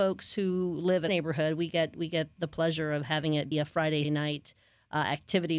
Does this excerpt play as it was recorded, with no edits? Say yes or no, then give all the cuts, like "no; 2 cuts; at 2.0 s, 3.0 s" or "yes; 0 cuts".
no; 4 cuts; at 1.1 s, 2.4 s, 3.5 s, 4.0 s